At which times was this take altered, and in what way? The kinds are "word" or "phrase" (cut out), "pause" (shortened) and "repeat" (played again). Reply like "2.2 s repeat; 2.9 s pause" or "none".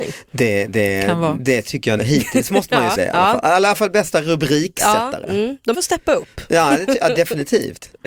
2.0 s word; 2.9 s word; 5.7 s word

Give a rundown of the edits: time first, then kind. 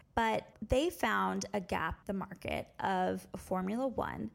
2.0 s word

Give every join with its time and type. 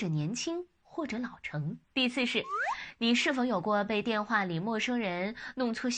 1.8 s pause

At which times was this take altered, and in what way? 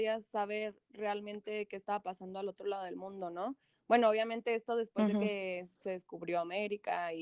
none

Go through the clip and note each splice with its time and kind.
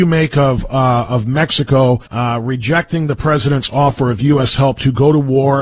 2.1 s pause

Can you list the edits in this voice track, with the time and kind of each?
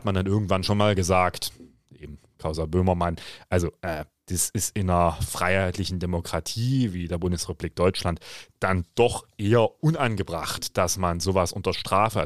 none

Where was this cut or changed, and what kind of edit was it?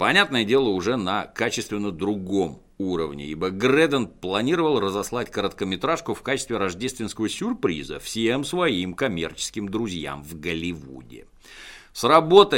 none

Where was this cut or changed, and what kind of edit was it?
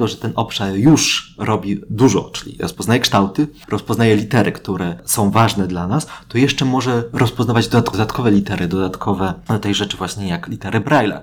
none

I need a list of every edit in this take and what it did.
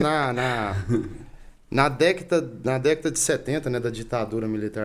none

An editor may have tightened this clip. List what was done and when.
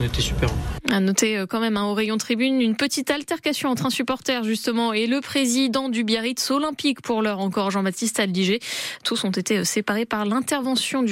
none

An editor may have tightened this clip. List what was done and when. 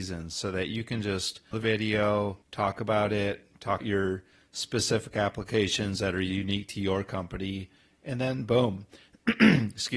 1.5 s phrase; 2.4 s pause; 3.8 s word

